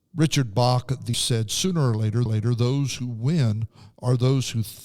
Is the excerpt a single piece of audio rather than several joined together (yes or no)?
no